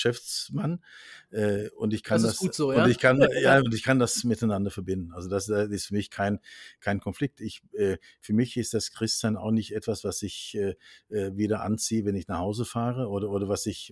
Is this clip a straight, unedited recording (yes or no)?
yes